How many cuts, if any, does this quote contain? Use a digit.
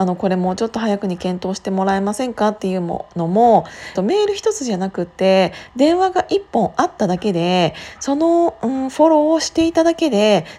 1